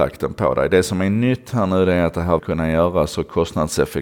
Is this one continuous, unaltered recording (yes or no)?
no